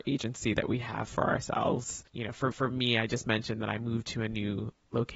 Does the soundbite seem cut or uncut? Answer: cut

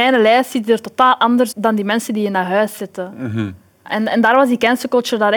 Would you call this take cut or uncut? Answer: cut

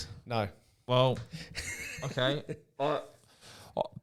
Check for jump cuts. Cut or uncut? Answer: uncut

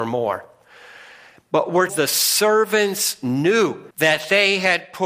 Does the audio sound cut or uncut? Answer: cut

